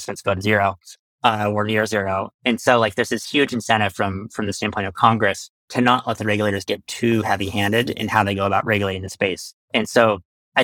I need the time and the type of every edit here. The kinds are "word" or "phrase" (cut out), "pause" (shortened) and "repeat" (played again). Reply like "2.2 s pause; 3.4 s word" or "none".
none